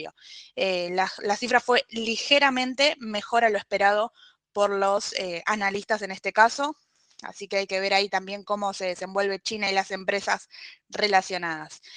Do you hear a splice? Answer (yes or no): no